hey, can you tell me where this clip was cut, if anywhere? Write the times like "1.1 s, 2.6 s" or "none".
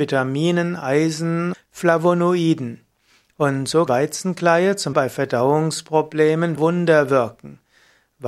1.5 s, 3.9 s, 4.9 s, 6.6 s